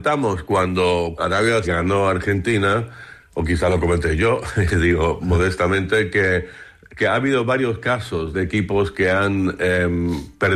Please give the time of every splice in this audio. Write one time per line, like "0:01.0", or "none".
0:01.2
0:01.6
0:08.3